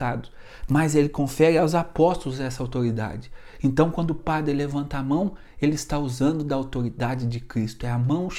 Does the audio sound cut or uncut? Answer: uncut